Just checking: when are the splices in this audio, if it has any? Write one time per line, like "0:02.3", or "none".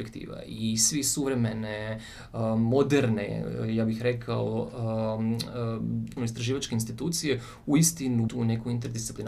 0:06.2
0:08.3